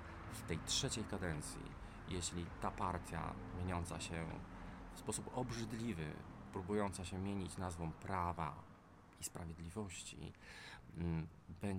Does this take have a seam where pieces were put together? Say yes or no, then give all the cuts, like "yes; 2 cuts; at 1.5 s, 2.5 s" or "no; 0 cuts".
no; 0 cuts